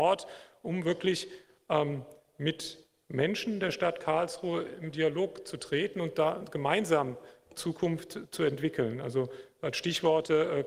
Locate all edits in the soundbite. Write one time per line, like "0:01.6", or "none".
none